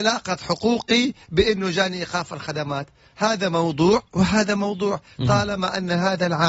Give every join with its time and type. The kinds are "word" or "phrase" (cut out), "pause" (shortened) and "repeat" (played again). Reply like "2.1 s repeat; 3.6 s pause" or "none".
none